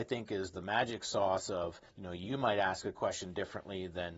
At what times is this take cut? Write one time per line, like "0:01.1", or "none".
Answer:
0:01.9